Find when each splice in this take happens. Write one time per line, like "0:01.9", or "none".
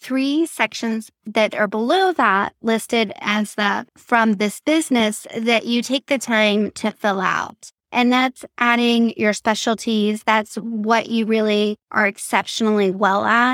0:03.9
0:07.8
0:11.8

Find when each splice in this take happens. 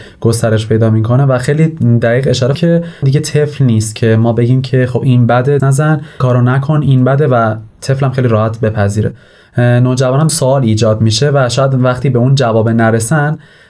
0:02.5
0:03.0
0:05.6
0:06.2
0:10.3

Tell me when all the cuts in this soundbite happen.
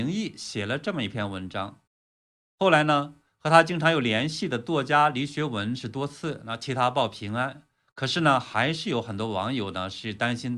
none

